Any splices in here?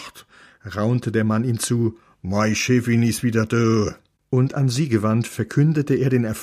no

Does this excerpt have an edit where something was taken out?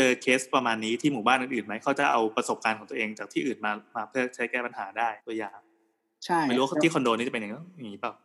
yes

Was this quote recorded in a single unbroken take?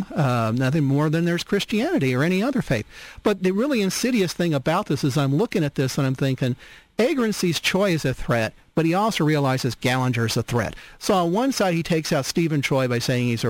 yes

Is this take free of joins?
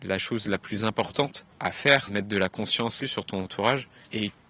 no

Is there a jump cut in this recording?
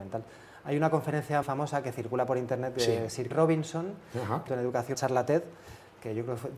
yes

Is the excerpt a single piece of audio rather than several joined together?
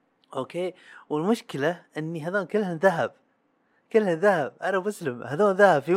yes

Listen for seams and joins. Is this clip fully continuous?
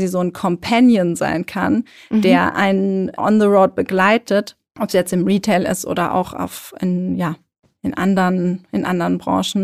yes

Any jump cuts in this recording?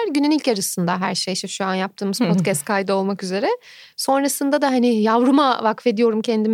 no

